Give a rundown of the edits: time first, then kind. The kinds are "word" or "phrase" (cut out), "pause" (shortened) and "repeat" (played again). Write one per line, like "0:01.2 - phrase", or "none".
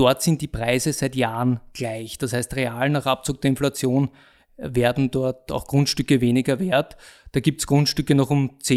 none